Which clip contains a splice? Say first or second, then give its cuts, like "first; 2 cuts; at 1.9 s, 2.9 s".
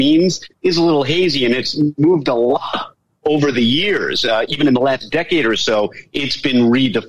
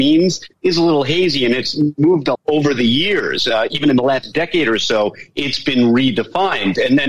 second; 1 cut; at 2.3 s